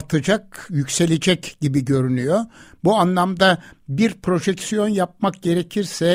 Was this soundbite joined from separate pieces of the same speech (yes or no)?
no